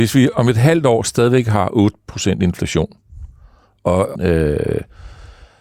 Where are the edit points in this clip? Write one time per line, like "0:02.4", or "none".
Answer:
0:04.2